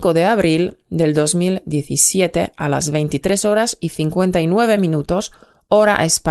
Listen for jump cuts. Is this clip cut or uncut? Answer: uncut